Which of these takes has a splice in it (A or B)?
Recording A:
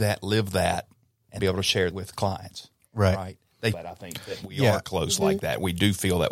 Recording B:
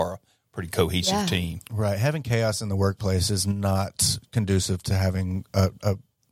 A